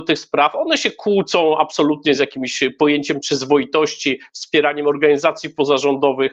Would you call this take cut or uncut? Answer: uncut